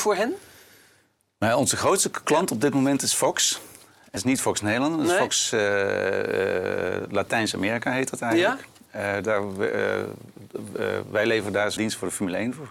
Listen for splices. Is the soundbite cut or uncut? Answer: cut